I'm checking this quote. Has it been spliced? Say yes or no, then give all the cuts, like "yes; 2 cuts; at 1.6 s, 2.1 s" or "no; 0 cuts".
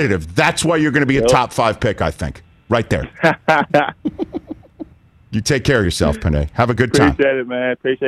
no; 0 cuts